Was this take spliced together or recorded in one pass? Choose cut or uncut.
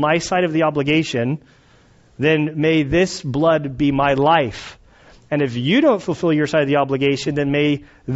uncut